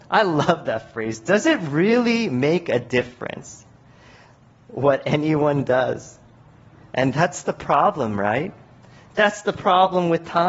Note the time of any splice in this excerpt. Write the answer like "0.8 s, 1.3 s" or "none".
none